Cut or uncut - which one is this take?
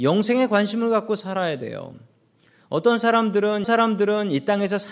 cut